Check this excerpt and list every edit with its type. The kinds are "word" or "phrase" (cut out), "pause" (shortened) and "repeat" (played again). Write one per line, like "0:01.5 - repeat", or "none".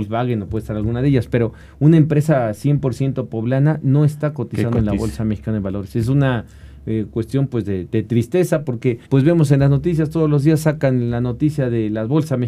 0:09.0 - pause